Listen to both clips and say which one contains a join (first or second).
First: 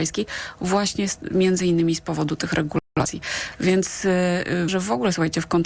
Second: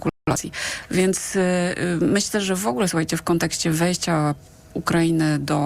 first